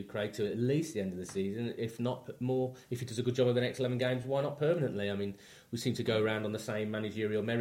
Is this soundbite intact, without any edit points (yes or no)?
yes